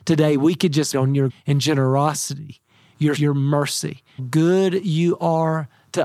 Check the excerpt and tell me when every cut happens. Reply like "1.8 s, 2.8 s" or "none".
0.9 s, 1.3 s, 3.2 s, 4.2 s

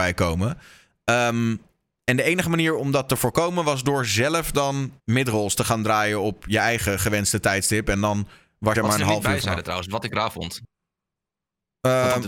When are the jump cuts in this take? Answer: 5.0 s, 8.7 s

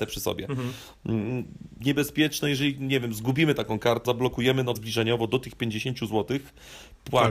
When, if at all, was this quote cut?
1.8 s, 4.1 s, 4.8 s

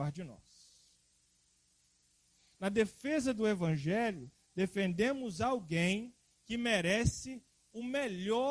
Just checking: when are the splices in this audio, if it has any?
none

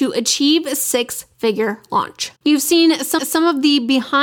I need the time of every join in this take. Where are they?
2.4 s, 3.2 s

